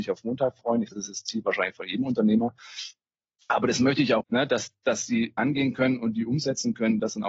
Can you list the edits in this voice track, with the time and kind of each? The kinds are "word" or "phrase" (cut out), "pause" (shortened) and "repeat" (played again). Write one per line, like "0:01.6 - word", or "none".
0:00.9 - word
0:04.2 - word
0:05.4 - word